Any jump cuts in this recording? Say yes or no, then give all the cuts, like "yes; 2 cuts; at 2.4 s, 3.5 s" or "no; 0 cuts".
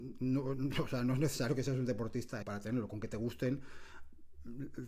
yes; 1 cut; at 2.4 s